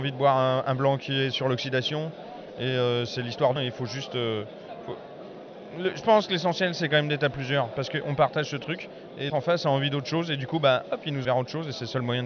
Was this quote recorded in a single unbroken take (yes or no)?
no